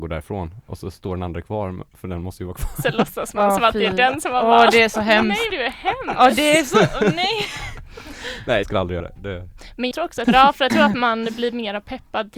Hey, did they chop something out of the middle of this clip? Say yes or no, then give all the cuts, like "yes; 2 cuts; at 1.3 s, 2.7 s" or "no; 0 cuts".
yes; 6 cuts; at 5.5 s, 8.6 s, 9.0 s, 9.9 s, 10.2 s, 10.7 s